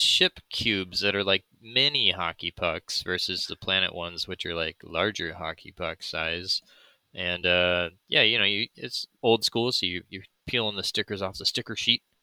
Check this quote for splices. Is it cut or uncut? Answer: uncut